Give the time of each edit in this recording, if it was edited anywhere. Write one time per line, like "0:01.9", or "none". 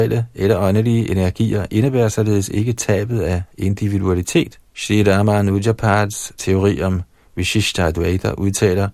0:04.7